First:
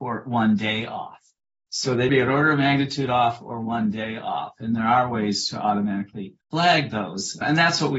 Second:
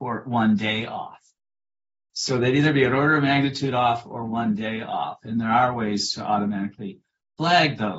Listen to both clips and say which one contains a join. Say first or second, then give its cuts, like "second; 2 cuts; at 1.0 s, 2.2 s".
first; 3 cuts; at 1.4 s, 2.1 s, 6.4 s